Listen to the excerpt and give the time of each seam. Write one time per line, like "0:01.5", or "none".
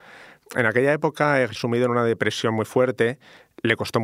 0:01.6

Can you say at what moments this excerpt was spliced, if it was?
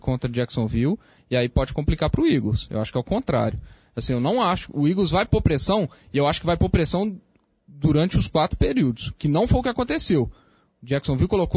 none

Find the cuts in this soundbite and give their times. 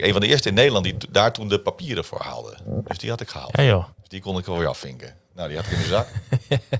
0:03.9

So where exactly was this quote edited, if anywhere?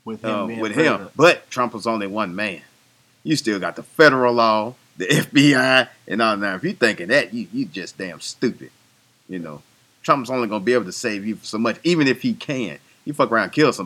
none

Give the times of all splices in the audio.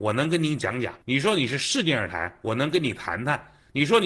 0:01.0

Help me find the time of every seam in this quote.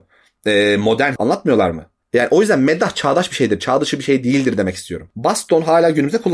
0:01.2

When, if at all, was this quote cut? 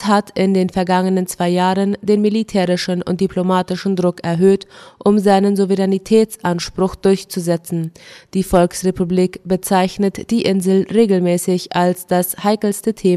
none

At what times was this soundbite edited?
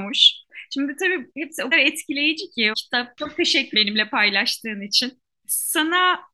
0:01.3
0:01.7
0:02.7
0:03.7

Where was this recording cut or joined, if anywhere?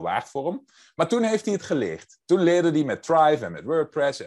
0:02.2

